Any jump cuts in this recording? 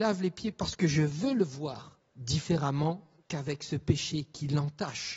yes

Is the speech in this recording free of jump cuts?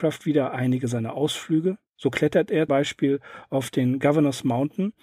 no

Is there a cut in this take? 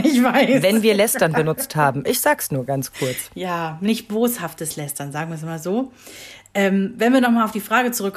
no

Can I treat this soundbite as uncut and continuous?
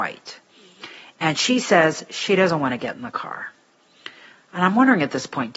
yes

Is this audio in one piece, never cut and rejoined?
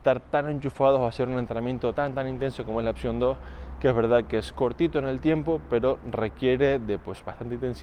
no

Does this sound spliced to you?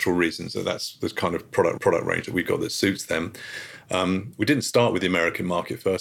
yes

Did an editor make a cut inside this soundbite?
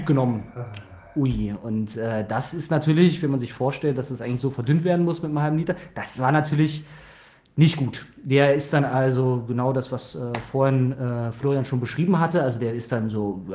no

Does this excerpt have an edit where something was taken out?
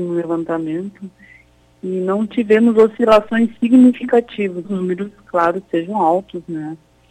yes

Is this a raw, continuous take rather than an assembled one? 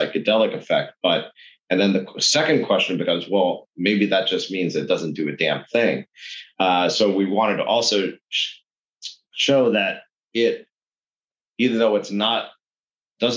yes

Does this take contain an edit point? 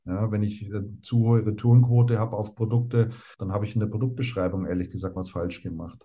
yes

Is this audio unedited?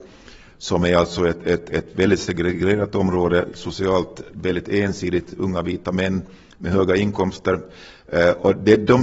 yes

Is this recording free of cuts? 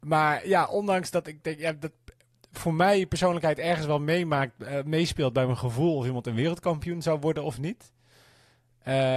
yes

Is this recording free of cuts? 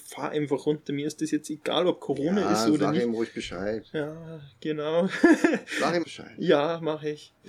no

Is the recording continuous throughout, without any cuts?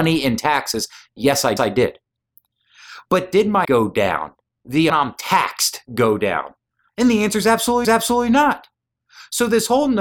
no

